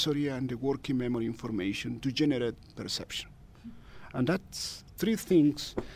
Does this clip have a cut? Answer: no; 0 cuts

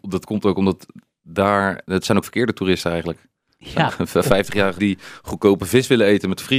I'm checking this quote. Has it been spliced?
yes; 4 cuts; at 1.8 s, 2.2 s, 3.9 s, 4.8 s

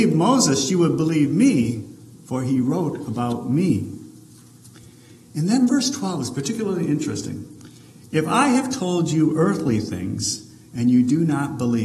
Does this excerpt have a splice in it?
no; 0 cuts

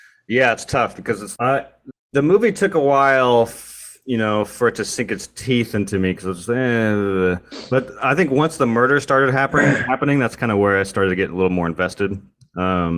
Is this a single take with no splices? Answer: no; 2 cuts; at 1.4 s, 1.9 s

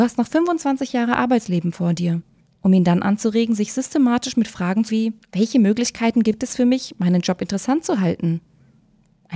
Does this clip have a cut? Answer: yes; 3 cuts; at 2.4 s, 4.9 s, 5.2 s

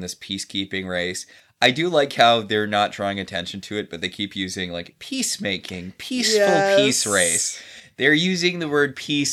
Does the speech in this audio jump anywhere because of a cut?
no; 0 cuts

